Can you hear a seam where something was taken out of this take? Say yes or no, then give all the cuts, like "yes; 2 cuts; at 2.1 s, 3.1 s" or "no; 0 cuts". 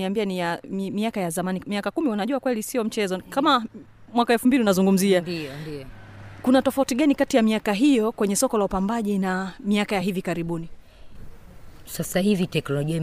no; 0 cuts